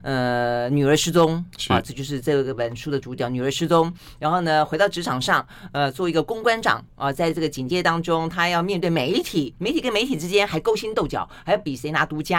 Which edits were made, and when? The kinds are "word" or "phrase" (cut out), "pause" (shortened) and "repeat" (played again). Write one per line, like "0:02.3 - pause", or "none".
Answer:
none